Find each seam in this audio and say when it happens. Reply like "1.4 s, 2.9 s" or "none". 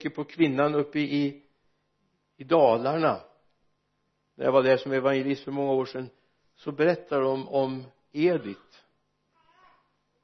none